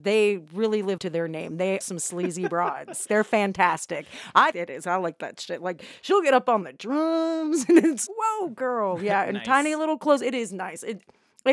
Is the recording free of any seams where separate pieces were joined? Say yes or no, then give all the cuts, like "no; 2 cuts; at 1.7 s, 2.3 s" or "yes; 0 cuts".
no; 5 cuts; at 1.0 s, 1.8 s, 3.1 s, 4.5 s, 8.1 s